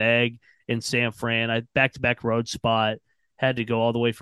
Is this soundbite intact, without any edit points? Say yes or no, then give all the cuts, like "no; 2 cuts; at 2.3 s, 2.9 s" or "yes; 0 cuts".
yes; 0 cuts